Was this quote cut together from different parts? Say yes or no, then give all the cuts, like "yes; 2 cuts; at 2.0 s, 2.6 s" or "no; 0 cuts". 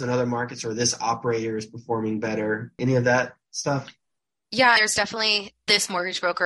no; 0 cuts